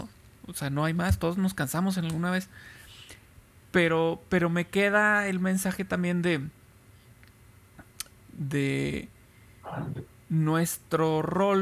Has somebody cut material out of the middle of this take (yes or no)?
no